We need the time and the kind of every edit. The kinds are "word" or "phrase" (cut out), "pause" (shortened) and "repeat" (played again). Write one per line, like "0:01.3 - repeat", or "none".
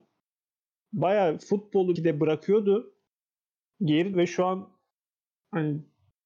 0:02.0 - word
0:04.1 - word